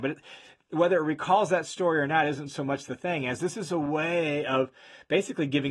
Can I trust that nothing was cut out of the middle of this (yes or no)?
yes